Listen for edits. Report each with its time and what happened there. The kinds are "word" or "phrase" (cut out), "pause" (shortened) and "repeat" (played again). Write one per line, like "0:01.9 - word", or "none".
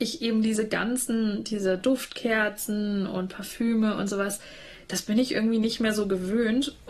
none